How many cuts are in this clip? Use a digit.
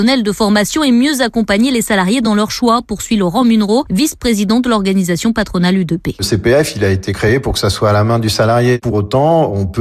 0